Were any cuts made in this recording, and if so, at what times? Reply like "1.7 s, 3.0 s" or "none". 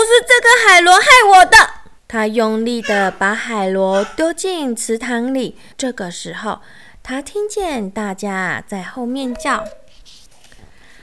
2.0 s, 5.7 s